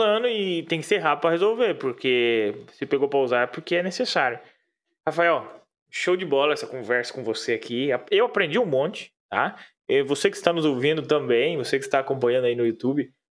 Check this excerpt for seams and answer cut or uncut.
uncut